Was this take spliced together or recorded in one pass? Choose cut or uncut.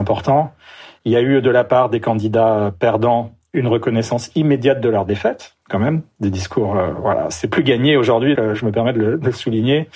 cut